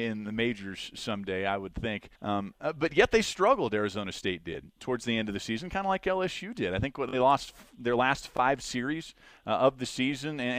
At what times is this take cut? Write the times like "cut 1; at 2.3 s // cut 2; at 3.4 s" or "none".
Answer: cut 1; at 2.1 s